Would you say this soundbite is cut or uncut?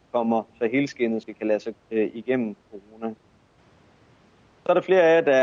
cut